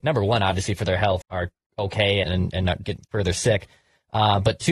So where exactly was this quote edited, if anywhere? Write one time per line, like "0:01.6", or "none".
0:01.2
0:02.2
0:02.8